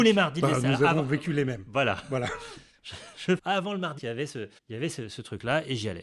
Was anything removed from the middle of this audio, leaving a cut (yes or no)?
yes